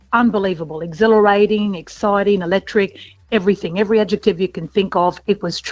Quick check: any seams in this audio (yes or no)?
no